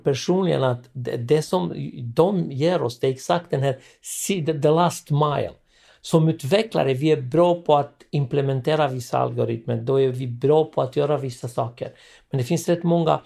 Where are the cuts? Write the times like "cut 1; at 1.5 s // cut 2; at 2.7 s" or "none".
none